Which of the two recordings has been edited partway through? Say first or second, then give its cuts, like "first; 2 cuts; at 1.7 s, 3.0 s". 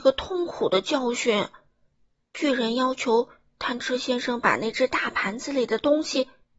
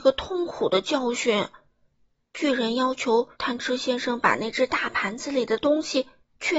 second; 1 cut; at 3.3 s